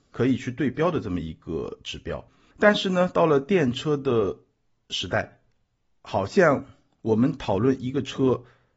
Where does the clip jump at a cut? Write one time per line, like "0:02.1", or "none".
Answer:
none